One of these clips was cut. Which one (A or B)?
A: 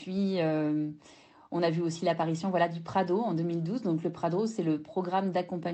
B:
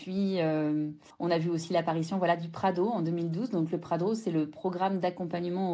B